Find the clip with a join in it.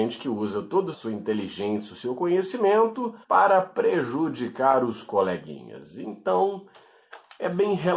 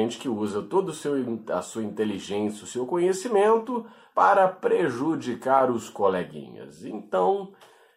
first; 2 cuts; at 0.9 s, 3.2 s

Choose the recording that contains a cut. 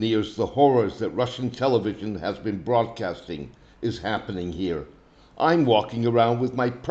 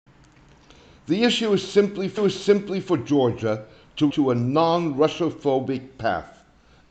second; 2 cuts; at 2.2 s, 4.1 s

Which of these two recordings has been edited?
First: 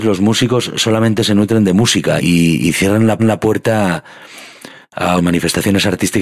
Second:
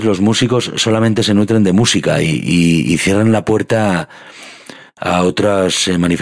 first; 3 cuts; at 2.2 s, 3.2 s, 5.2 s

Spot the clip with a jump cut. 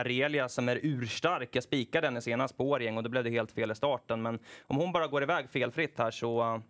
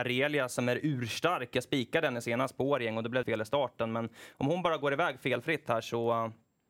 second; 1 cut; at 3.2 s

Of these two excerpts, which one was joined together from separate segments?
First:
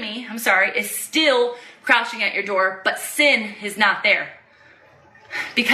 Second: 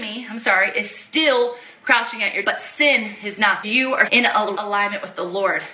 second; 4 cuts; at 2.4 s, 3.6 s, 4.1 s, 4.5 s

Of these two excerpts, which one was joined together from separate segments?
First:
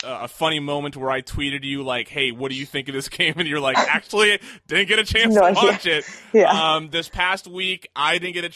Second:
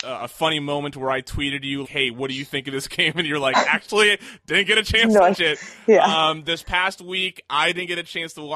second; 2 cuts; at 1.8 s, 5.3 s

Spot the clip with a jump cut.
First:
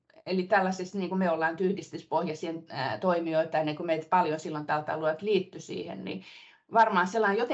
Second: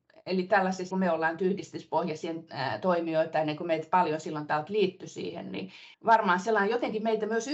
second; 3 cuts; at 0.9 s, 4.7 s, 5.9 s

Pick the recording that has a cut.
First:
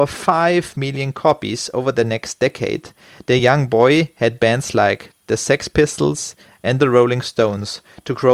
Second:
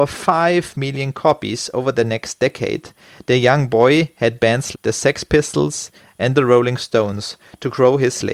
second; 1 cut; at 4.7 s

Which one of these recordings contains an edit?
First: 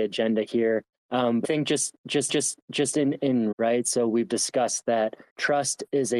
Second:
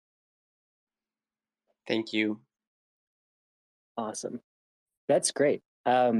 first; 5 cuts; at 0.9 s, 1.4 s, 2.3 s, 3.5 s, 5.3 s

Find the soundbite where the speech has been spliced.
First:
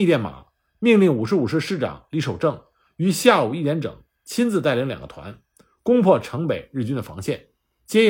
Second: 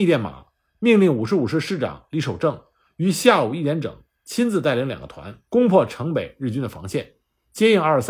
second; 1 cut; at 5.5 s

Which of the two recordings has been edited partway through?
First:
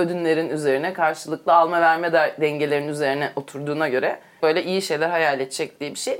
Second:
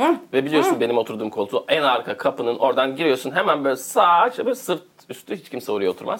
first; 1 cut; at 4.4 s

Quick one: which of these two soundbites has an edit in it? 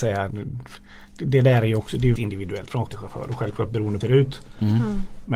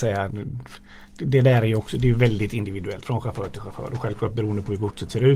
first; 3 cuts; at 2.2 s, 2.9 s, 4.0 s

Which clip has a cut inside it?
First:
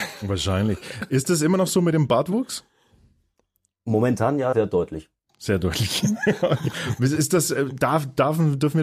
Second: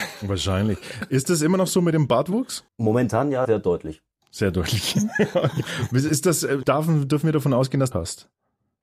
second; 3 cuts; at 2.7 s, 6.6 s, 7.9 s

